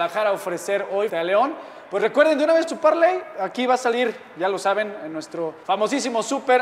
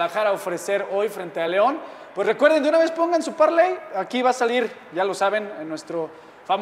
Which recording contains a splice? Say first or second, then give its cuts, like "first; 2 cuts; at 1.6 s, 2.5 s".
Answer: first; 3 cuts; at 1.1 s, 2.7 s, 5.6 s